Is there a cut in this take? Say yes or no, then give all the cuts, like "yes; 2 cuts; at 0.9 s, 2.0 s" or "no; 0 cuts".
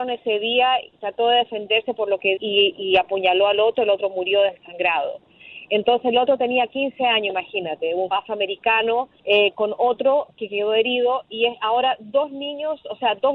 yes; 4 cuts; at 2.4 s, 2.8 s, 8.1 s, 9.2 s